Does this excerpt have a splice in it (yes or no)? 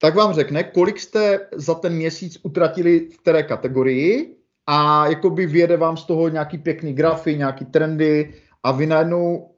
no